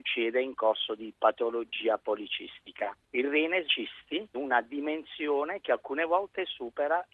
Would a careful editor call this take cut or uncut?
cut